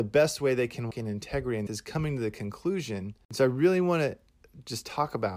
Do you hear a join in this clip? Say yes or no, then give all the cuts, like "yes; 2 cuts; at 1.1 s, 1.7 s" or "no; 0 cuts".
yes; 2 cuts; at 0.9 s, 1.7 s